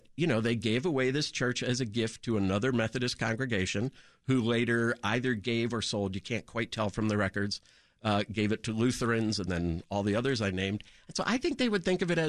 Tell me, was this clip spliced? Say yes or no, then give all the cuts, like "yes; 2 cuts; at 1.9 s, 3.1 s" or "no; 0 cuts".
no; 0 cuts